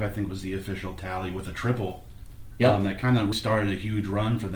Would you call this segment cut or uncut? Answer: cut